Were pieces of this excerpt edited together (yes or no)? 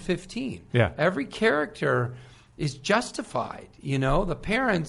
no